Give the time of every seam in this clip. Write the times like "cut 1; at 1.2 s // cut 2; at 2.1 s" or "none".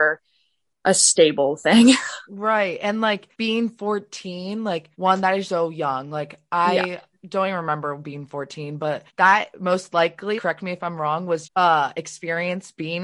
cut 1; at 3.3 s // cut 2; at 4.9 s // cut 3; at 5.4 s // cut 4; at 9.1 s // cut 5; at 10.4 s // cut 6; at 11.4 s